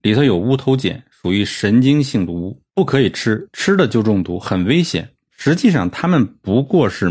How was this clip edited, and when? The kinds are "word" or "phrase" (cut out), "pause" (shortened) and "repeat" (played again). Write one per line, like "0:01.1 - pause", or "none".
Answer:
0:02.7 - pause